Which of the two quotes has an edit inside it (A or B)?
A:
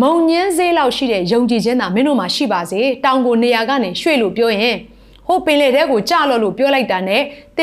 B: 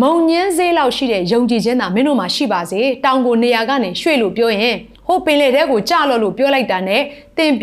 B